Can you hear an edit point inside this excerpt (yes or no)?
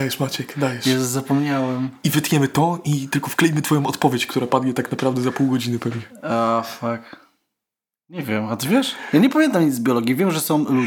no